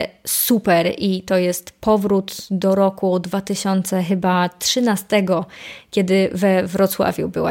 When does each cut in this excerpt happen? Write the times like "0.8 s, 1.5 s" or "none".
none